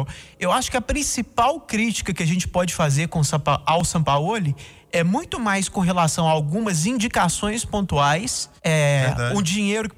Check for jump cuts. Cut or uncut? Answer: cut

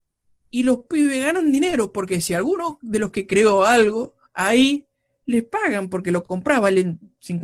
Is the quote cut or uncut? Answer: cut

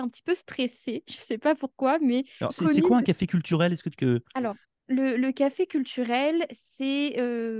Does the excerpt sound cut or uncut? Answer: cut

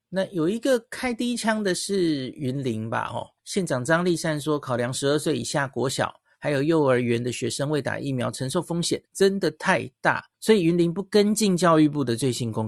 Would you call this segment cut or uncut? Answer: cut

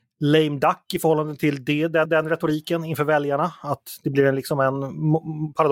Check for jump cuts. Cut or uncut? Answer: cut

